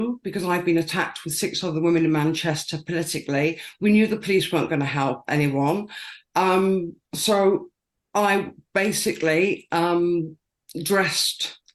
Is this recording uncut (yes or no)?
yes